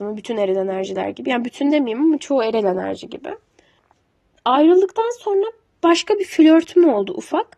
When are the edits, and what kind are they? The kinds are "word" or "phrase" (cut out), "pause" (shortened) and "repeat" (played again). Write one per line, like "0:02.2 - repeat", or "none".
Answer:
none